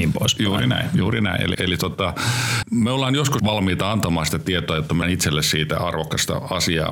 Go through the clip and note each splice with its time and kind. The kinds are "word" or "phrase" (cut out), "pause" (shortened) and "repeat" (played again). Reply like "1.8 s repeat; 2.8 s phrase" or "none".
1.5 s word; 2.6 s word; 3.4 s word; 5.0 s word